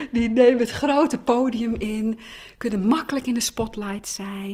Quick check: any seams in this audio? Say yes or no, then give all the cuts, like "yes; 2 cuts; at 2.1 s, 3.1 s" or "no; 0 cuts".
no; 0 cuts